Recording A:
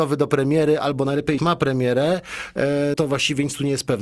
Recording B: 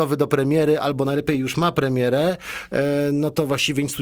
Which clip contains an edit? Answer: A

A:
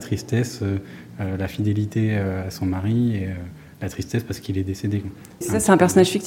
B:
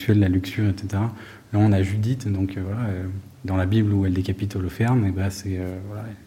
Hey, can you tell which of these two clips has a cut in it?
B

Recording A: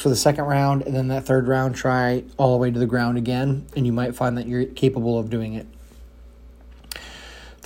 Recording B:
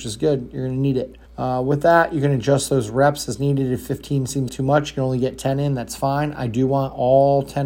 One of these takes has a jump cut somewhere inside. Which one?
B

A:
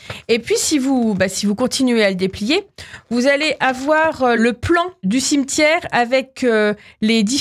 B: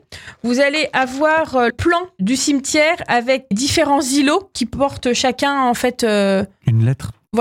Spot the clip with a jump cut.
B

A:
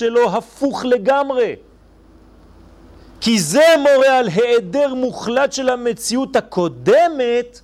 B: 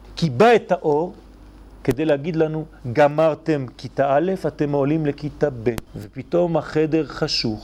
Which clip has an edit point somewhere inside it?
B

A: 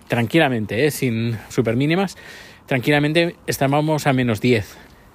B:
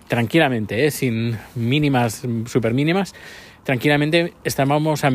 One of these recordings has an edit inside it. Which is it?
A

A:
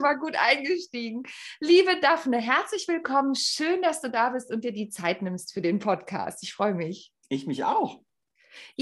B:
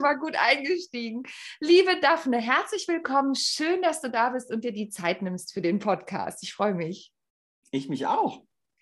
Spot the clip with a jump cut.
A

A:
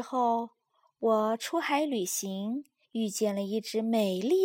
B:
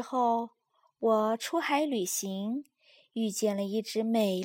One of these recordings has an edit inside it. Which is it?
A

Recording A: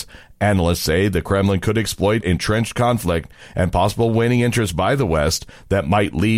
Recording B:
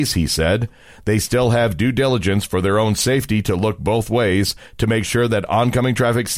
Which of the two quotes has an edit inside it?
A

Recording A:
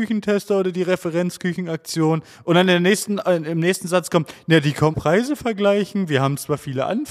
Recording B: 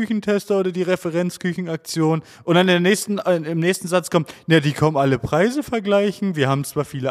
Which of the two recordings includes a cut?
A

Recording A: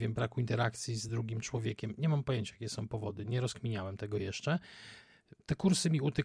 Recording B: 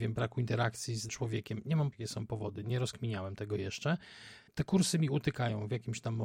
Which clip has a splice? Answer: B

